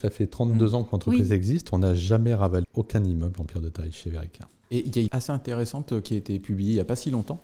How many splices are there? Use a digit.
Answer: 2